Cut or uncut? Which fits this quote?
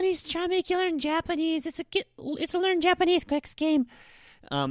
uncut